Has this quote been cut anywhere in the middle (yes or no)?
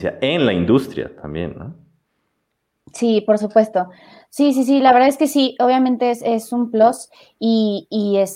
no